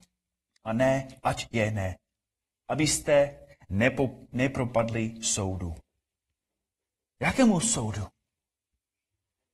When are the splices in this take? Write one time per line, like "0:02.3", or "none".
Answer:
none